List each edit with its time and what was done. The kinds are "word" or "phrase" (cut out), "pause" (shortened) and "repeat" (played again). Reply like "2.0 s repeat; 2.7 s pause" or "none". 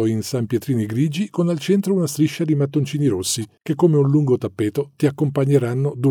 none